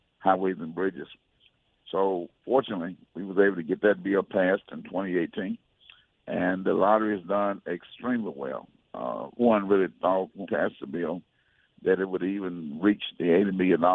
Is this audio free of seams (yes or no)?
no